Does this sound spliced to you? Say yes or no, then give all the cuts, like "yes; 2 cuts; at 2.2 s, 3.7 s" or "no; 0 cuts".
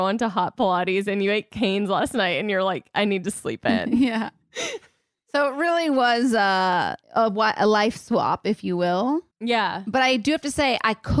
yes; 2 cuts; at 7.0 s, 9.3 s